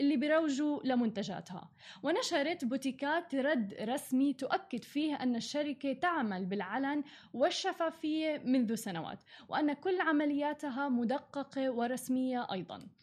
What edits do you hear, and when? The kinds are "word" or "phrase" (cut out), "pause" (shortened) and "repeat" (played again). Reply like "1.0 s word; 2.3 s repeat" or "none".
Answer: none